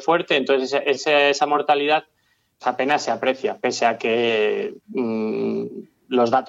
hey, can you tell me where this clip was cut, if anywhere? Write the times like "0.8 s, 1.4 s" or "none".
2.6 s

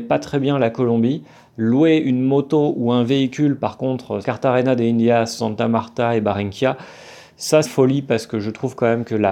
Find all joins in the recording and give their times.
4.2 s, 7.6 s

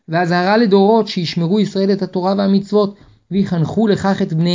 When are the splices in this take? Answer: none

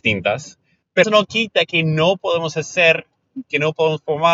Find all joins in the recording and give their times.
1.0 s

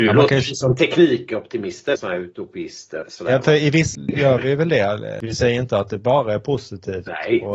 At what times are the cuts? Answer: 1.9 s, 3.0 s, 3.9 s

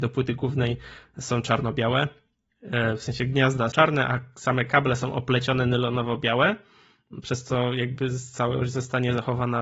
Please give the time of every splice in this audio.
3.7 s

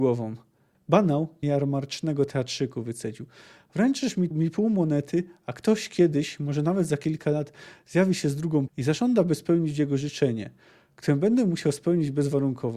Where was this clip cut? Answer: 1.4 s, 4.3 s, 8.7 s

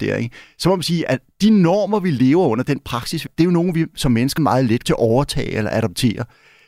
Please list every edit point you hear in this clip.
3.3 s, 4.4 s, 4.8 s

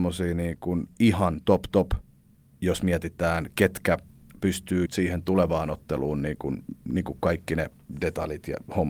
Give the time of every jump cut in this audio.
4.9 s

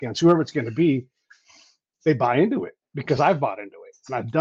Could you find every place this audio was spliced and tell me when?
none

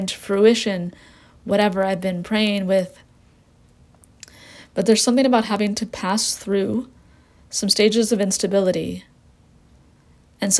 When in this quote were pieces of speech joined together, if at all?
none

